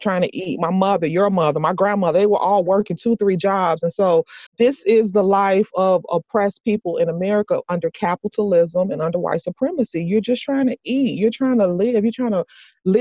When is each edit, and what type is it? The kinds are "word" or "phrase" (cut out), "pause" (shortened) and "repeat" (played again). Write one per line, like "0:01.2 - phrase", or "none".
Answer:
0:04.5 - pause